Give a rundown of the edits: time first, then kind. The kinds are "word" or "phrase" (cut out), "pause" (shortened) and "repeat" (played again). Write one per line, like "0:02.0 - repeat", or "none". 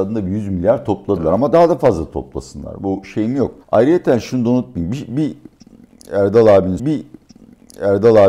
0:03.6 - pause
0:06.8 - repeat